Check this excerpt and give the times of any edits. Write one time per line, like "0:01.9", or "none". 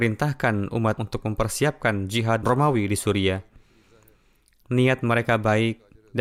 0:01.0
0:02.4